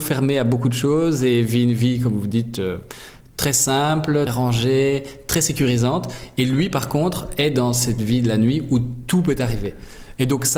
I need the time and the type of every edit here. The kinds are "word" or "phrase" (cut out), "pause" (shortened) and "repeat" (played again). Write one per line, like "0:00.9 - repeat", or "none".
0:04.3 - word